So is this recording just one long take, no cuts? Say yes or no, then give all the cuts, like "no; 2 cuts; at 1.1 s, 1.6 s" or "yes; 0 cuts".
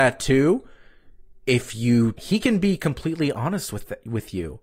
no; 1 cut; at 2.2 s